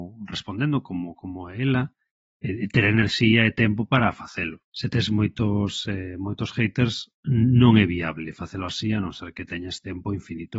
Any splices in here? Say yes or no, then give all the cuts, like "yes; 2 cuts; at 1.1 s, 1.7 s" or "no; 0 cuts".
yes; 2 cuts; at 4.7 s, 7.2 s